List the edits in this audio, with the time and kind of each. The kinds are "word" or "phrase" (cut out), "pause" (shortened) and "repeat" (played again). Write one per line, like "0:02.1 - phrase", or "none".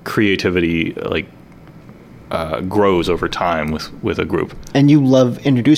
none